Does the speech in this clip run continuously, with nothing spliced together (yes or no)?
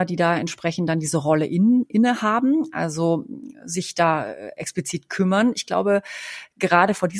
yes